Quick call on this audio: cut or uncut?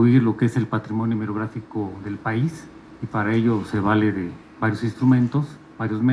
uncut